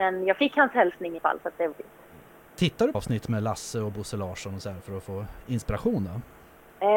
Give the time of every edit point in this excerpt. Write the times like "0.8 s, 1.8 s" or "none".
1.2 s, 1.7 s, 2.9 s